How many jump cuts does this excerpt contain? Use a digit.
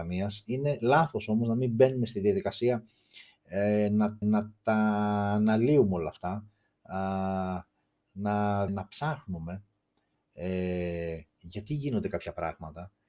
2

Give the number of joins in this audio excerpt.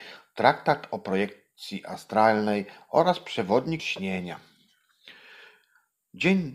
1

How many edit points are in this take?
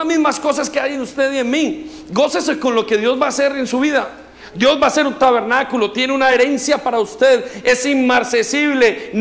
0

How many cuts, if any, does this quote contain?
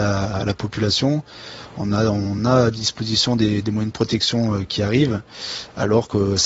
0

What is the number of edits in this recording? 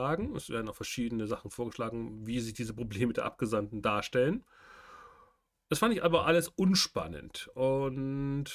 0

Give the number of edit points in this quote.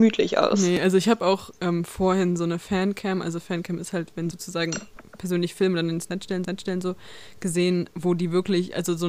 2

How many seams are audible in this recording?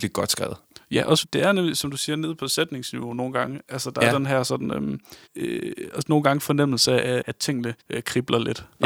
3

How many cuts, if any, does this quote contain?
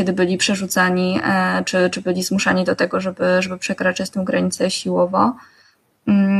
0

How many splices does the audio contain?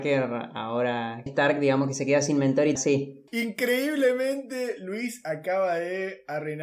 3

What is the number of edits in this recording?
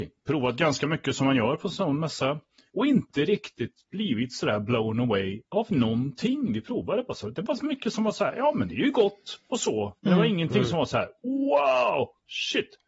0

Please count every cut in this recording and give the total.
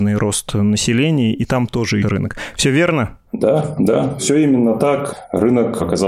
1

